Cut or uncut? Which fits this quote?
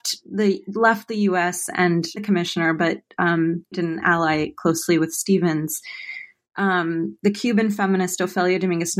cut